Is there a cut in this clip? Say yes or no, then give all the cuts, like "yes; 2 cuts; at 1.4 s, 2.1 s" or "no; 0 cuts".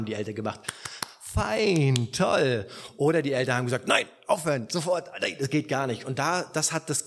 no; 0 cuts